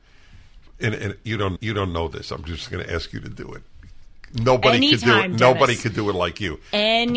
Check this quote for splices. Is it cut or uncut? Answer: cut